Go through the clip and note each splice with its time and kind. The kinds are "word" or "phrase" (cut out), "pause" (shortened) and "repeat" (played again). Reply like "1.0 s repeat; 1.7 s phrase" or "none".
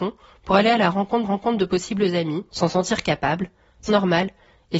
1.2 s repeat; 2.5 s pause; 3.9 s word